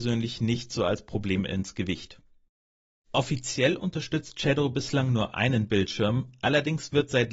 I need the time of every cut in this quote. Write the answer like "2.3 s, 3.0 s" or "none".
none